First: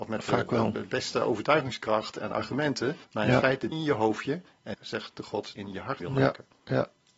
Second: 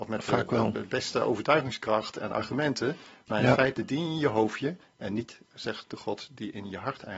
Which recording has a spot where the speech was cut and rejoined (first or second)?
first